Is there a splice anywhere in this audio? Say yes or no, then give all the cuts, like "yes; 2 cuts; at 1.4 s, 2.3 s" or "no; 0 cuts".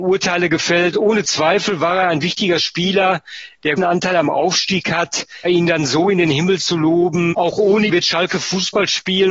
yes; 4 cuts; at 3.8 s, 5.4 s, 7.3 s, 7.9 s